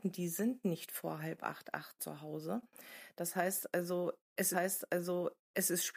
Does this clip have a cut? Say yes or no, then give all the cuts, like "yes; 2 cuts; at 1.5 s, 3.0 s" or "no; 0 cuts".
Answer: yes; 1 cut; at 4.5 s